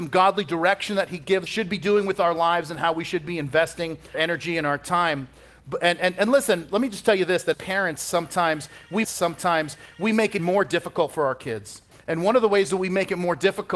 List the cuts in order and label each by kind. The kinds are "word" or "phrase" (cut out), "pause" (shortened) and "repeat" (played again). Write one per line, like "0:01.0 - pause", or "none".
0:01.5 - phrase
0:04.1 - word
0:07.5 - word
0:09.0 - repeat
0:10.4 - word
0:11.9 - pause